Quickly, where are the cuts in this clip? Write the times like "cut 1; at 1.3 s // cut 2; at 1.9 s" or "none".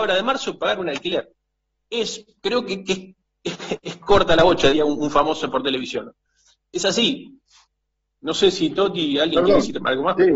none